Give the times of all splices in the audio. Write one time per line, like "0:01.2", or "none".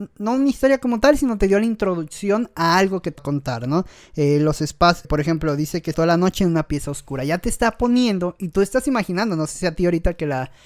0:03.2
0:05.0
0:05.9